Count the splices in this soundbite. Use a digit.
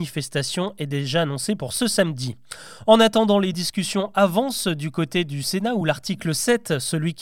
0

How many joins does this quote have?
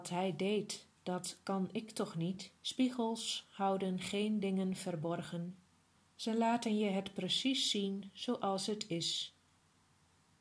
3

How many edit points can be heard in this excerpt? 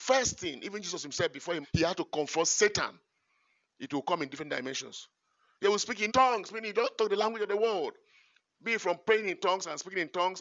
3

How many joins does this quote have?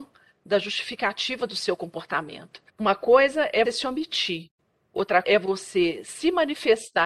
3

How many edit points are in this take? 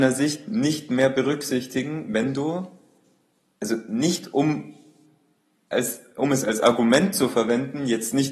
0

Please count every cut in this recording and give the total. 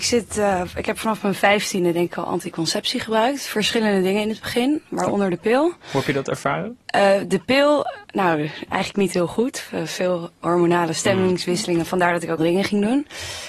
3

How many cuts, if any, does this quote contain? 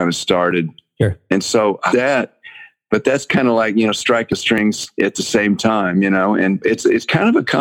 2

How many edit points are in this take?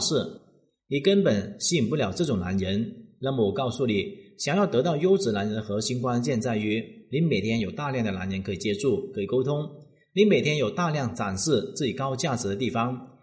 0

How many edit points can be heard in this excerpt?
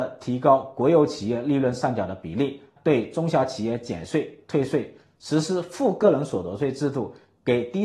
1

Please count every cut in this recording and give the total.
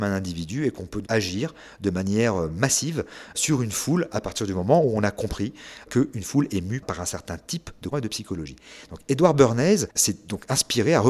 3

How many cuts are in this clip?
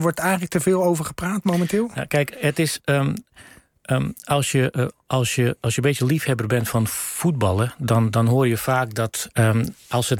1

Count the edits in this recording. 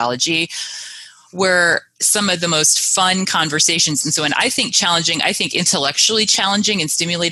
0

